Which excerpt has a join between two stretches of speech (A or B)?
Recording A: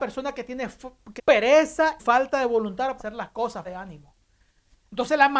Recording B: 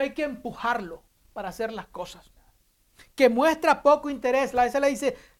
A